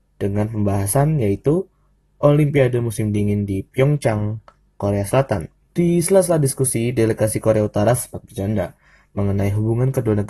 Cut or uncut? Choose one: uncut